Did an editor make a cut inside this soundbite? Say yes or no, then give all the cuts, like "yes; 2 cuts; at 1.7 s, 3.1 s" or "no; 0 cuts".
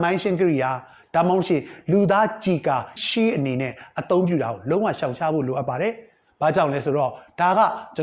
yes; 1 cut; at 3.0 s